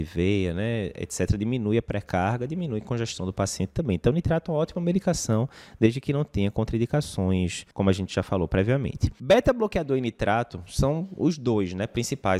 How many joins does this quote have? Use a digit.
1